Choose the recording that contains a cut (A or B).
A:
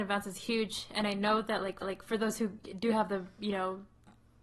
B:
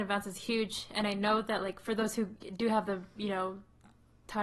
A